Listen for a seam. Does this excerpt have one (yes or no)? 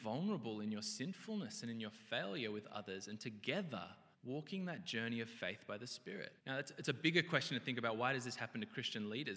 yes